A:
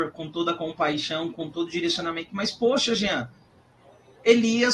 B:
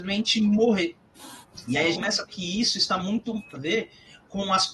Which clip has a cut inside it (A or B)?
B